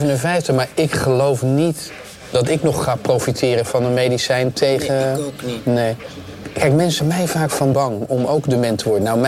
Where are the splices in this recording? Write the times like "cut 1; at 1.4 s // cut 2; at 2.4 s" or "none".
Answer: cut 1; at 7.0 s // cut 2; at 7.7 s